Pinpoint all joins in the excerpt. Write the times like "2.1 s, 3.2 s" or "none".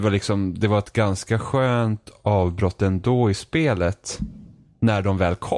none